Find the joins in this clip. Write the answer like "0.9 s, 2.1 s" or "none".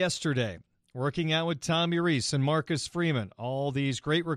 none